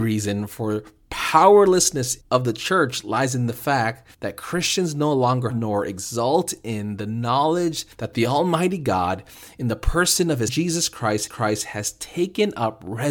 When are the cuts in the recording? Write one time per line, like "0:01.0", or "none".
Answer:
0:02.2
0:04.1
0:05.5
0:07.9
0:10.5
0:11.3